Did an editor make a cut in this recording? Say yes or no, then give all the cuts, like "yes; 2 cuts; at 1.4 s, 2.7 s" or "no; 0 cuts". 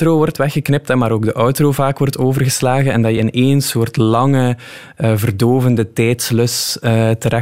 no; 0 cuts